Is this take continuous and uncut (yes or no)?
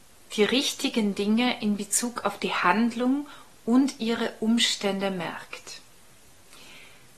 yes